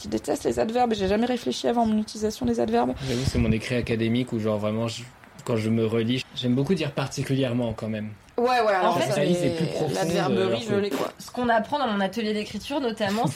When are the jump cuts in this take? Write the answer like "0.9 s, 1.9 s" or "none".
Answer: 6.2 s, 9.2 s